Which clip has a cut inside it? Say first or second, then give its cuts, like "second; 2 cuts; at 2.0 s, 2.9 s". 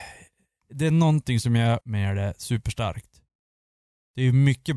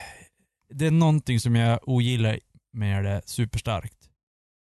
first; 1 cut; at 1.8 s